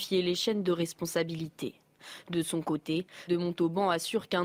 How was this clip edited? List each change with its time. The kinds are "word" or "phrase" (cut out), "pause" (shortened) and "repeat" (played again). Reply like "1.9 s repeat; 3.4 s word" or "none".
3.3 s word